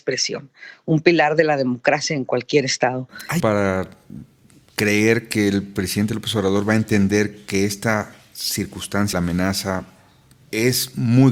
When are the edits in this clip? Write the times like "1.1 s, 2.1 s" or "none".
3.4 s, 9.1 s